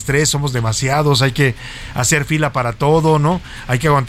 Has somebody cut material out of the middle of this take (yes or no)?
no